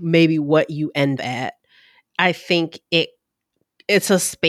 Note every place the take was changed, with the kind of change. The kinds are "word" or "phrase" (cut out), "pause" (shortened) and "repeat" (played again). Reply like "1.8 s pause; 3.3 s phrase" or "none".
1.2 s word